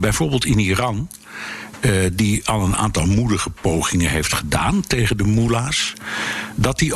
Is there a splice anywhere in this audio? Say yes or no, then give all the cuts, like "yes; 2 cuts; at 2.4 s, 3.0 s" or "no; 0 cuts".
no; 0 cuts